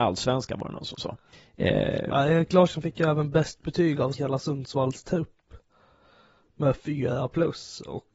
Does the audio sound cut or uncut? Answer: cut